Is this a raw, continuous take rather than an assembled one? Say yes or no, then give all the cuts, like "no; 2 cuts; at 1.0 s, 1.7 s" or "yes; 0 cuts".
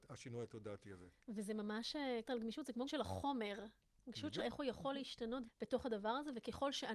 no; 4 cuts; at 2.2 s, 2.8 s, 4.4 s, 5.4 s